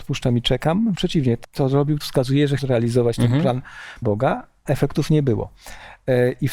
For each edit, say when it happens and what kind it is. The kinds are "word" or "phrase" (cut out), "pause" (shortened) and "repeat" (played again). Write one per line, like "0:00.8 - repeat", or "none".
0:00.9 - word
0:01.4 - word
0:02.0 - word
0:02.6 - word
0:04.0 - word
0:04.7 - word